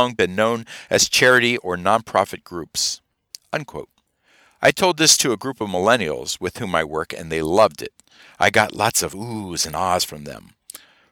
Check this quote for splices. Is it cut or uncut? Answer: uncut